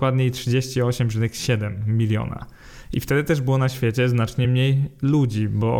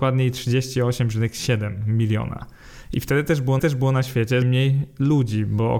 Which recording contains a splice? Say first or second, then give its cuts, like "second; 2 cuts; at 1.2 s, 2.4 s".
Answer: second; 2 cuts; at 3.6 s, 4.4 s